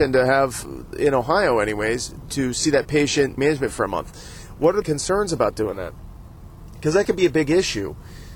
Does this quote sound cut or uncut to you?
cut